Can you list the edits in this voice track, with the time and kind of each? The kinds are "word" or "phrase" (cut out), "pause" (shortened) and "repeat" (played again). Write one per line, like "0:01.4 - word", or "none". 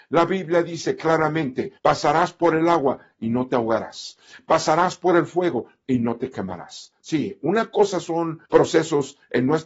0:01.8 - pause
0:08.5 - pause